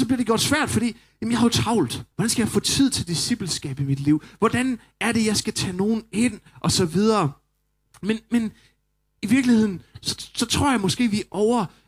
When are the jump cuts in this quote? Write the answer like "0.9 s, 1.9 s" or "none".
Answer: 2.1 s